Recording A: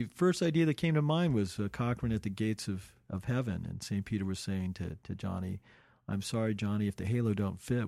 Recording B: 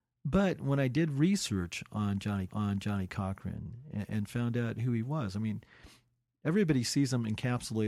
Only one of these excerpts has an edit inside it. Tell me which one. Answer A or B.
B